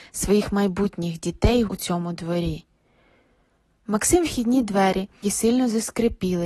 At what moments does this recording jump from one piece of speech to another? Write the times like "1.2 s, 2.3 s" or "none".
1.7 s, 4.2 s, 5.2 s